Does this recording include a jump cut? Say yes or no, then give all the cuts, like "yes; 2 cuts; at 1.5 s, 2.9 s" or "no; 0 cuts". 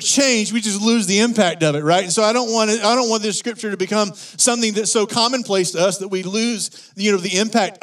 no; 0 cuts